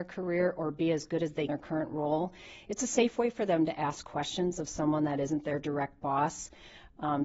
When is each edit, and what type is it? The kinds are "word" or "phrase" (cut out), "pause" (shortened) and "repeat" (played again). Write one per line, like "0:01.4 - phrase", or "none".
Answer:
0:01.5 - phrase